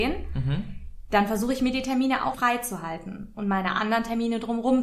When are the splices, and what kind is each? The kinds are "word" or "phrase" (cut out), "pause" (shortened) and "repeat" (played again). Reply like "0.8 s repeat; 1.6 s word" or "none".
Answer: 2.3 s word